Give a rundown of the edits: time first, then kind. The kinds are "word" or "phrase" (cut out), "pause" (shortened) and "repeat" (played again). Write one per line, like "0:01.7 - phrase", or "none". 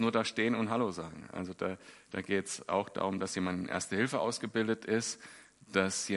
none